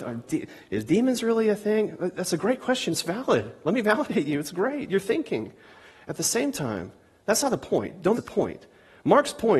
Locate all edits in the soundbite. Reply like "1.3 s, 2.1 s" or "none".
8.1 s